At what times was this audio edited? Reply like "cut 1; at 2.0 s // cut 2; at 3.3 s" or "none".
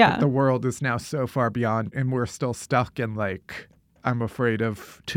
none